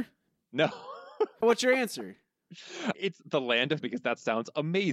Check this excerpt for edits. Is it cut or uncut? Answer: cut